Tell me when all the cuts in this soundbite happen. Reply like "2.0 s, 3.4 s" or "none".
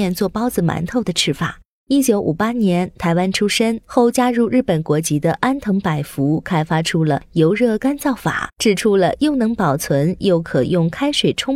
none

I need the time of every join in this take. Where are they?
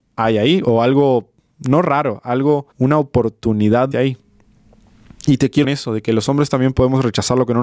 1.4 s, 2.7 s, 3.9 s, 5.6 s

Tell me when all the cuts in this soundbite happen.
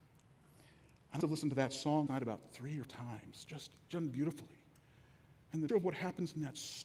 1.2 s, 2.1 s, 2.8 s, 3.9 s, 5.7 s

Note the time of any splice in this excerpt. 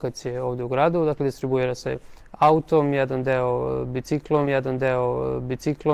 4.5 s

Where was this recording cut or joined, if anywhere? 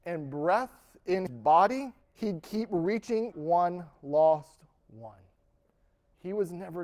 1.3 s, 2.0 s, 3.3 s

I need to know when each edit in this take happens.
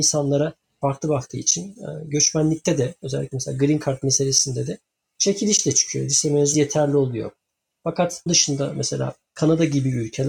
6.5 s, 8.3 s

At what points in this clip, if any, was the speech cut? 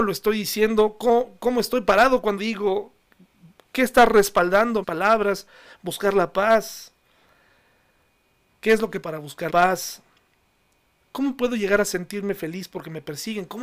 2.4 s, 4.8 s, 9.0 s, 9.5 s

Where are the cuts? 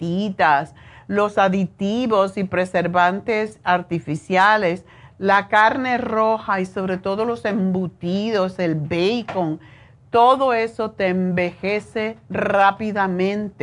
none

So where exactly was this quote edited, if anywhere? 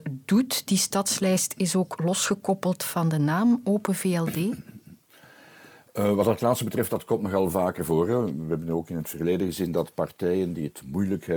none

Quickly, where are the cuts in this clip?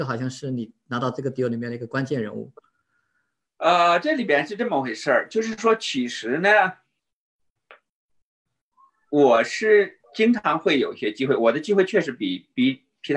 10.0 s

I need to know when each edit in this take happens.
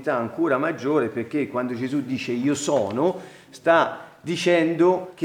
none

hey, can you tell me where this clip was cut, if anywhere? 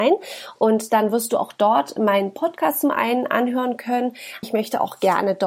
4.4 s

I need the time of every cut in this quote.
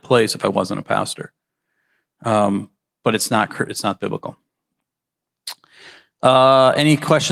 none

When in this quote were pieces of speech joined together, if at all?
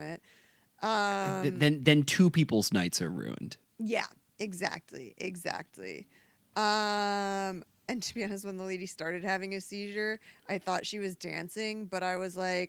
none

